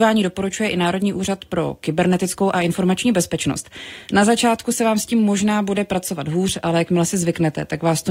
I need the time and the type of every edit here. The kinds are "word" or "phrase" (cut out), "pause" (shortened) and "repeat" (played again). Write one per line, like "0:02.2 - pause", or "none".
none